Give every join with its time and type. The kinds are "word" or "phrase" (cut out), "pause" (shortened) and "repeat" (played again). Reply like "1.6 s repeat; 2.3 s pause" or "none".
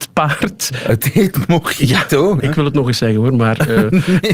1.0 s word; 2.4 s word